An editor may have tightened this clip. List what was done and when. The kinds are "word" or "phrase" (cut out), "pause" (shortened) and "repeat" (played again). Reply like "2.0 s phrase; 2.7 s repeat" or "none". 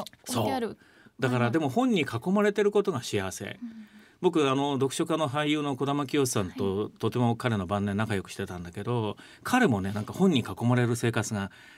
none

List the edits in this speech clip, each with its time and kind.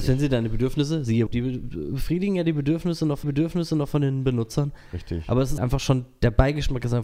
1.3 s word; 3.2 s repeat; 5.6 s word

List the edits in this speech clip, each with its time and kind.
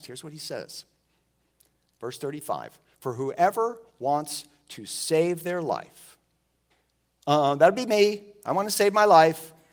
none

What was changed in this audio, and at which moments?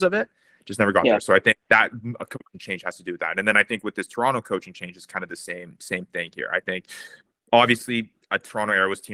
1.6 s pause

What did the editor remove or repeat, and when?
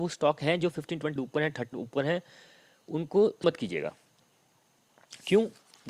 1.2 s word; 1.7 s word; 3.4 s word

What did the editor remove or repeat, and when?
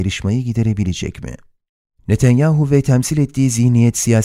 none

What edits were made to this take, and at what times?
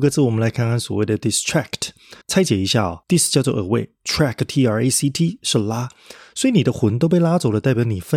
2.2 s pause; 3.0 s pause

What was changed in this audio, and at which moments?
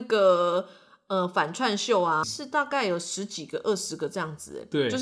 2.2 s word

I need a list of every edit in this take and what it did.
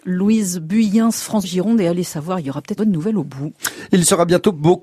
1.4 s word; 2.8 s word

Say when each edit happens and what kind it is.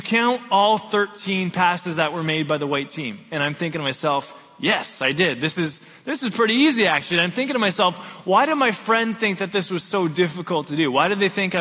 none

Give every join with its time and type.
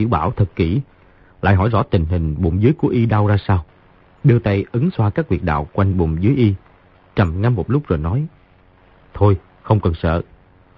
none

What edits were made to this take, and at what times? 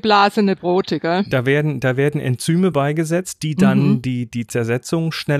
none

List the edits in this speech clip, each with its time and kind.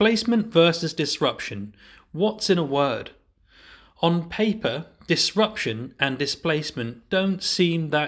none

